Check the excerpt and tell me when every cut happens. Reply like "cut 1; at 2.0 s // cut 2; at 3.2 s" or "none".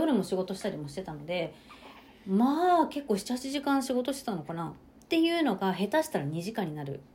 cut 1; at 2.1 s // cut 2; at 4.9 s